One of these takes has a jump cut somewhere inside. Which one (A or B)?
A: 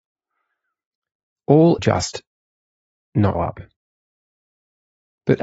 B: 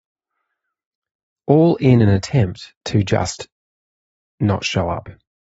A